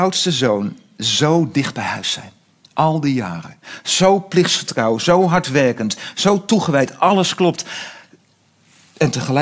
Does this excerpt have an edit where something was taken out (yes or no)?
no